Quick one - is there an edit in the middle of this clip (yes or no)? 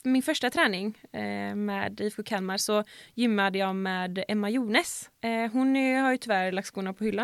yes